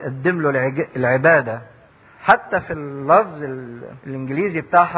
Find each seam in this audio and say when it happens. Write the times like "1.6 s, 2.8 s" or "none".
1.9 s, 4.0 s